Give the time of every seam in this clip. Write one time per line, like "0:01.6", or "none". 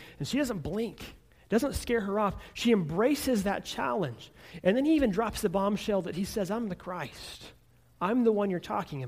none